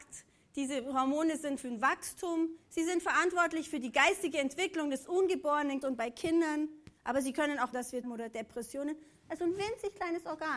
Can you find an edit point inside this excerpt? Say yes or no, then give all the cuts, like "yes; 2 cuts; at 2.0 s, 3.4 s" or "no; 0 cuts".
yes; 6 cuts; at 1.6 s, 2.6 s, 5.8 s, 7.0 s, 7.7 s, 8.0 s